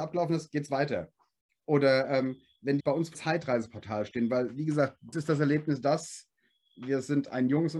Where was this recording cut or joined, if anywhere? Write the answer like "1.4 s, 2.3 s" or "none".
2.8 s, 3.1 s, 5.1 s